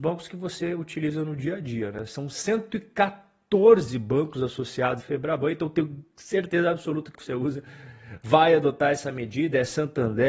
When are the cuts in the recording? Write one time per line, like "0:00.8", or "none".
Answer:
0:05.0
0:07.1